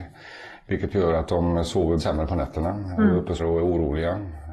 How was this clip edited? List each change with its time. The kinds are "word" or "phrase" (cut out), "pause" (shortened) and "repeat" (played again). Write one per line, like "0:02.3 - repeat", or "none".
0:02.0 - word
0:03.4 - word